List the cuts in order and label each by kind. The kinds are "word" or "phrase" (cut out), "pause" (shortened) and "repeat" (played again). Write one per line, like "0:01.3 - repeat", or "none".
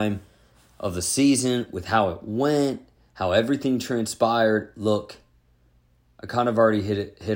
none